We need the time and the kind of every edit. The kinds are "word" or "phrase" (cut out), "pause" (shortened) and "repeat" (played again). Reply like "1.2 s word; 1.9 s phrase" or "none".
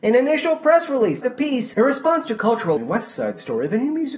1.2 s word; 1.7 s word; 2.8 s word